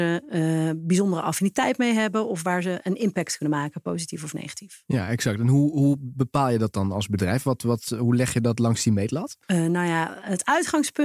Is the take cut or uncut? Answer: cut